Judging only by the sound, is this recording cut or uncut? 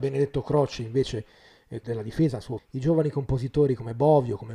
cut